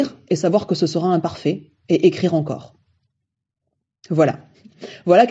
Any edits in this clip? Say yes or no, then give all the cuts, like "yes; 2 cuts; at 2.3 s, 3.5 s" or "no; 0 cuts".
no; 0 cuts